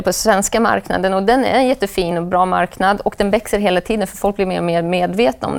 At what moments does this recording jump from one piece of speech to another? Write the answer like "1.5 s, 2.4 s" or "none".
none